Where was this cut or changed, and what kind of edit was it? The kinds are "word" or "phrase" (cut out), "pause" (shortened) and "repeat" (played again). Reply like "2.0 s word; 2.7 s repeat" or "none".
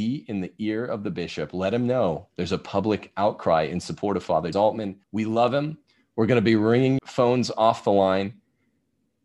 4.5 s word; 5.0 s pause; 7.0 s word

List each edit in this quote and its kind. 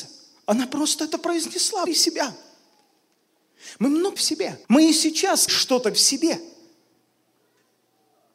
1.9 s word; 4.2 s phrase; 4.6 s pause; 5.5 s word; 5.9 s word

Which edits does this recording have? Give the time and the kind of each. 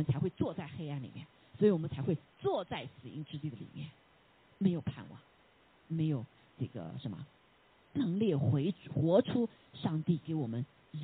5.8 s word

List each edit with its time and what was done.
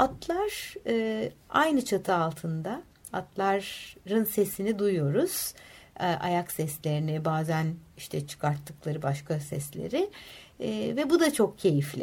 none

